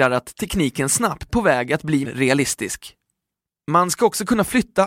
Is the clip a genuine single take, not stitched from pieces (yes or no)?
no